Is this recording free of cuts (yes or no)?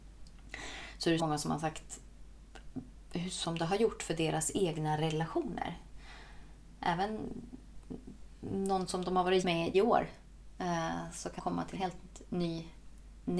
no